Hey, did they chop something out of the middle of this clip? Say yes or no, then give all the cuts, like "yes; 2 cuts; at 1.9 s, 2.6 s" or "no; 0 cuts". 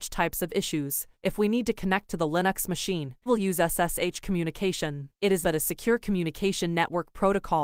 yes; 2 cuts; at 3.3 s, 5.4 s